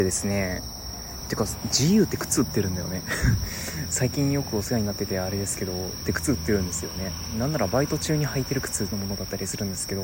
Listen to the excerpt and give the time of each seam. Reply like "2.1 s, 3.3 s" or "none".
6.0 s, 8.9 s